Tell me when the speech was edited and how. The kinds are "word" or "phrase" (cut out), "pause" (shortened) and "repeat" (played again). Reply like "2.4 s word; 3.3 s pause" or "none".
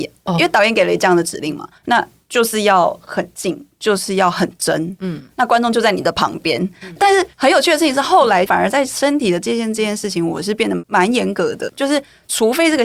1.8 s pause; 7.3 s pause; 11.7 s word